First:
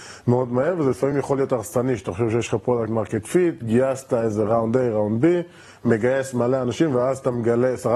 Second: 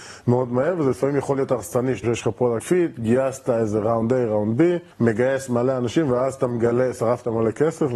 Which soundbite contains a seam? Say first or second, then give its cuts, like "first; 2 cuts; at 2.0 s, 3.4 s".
second; 3 cuts; at 2.0 s, 2.6 s, 4.9 s